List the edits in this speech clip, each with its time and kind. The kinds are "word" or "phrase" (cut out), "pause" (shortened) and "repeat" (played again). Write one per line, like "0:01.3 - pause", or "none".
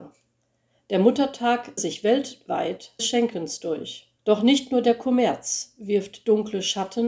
0:01.8 - word
0:03.0 - phrase
0:04.2 - pause